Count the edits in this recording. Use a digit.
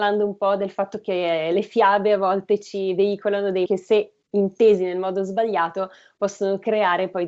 1